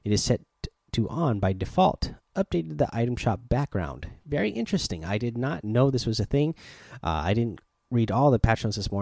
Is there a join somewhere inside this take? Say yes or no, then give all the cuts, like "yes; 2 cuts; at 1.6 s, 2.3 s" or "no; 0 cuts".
no; 0 cuts